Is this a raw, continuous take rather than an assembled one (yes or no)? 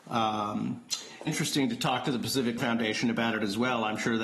no